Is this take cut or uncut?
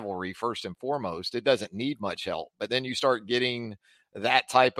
uncut